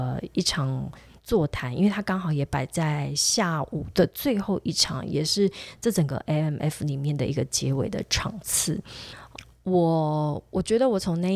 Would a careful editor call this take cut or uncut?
uncut